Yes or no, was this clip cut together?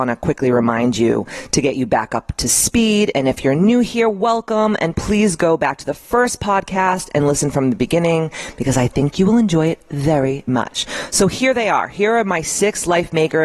yes